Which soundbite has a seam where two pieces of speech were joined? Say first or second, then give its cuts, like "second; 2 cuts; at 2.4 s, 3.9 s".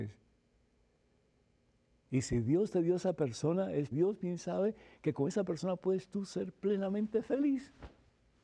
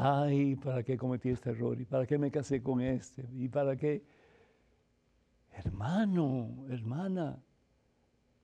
first; 1 cut; at 3.9 s